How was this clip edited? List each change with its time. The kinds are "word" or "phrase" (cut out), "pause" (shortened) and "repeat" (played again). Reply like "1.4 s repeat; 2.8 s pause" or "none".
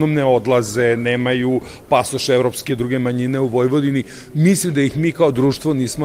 2.7 s phrase